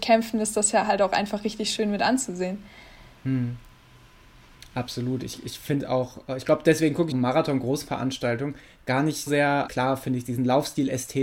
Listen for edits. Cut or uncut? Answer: cut